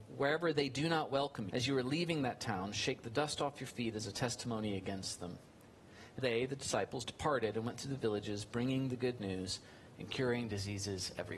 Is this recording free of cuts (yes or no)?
no